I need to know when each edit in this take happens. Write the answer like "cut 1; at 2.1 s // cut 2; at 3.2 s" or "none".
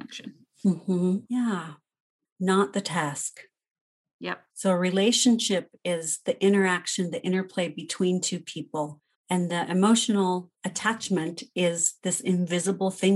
cut 1; at 1.2 s // cut 2; at 4.5 s // cut 3; at 9.1 s // cut 4; at 10.5 s